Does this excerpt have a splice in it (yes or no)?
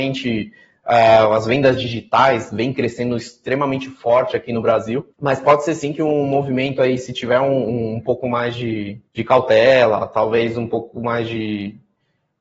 yes